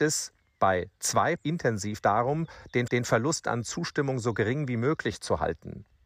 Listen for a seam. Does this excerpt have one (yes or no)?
yes